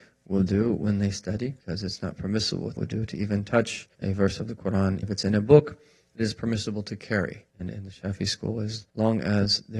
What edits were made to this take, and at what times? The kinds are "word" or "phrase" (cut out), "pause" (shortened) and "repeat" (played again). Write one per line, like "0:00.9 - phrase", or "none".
0:01.6 - pause
0:02.8 - word
0:03.9 - pause
0:05.0 - word
0:07.5 - pause
0:08.9 - pause

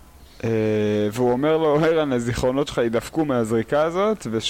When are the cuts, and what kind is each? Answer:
none

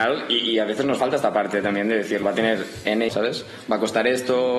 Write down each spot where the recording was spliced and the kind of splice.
0:02.2 - word
0:03.1 - word

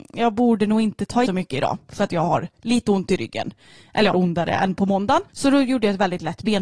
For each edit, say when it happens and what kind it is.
0:01.3 - phrase
0:04.1 - phrase
0:05.3 - pause

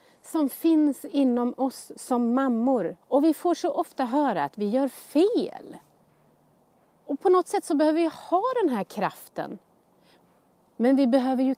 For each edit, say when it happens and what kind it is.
0:03.0 - pause
0:06.7 - pause

